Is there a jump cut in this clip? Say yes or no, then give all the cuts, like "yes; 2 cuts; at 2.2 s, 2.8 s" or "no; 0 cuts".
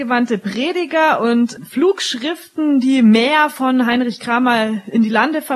no; 0 cuts